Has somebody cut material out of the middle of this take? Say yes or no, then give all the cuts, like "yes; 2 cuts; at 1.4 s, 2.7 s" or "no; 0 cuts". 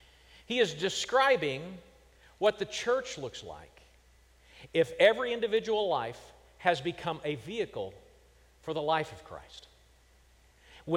no; 0 cuts